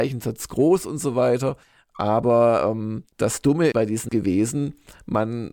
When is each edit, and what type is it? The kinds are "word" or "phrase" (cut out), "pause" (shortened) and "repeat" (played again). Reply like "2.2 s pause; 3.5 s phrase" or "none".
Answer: 1.6 s pause; 3.1 s pause; 3.7 s word; 4.1 s word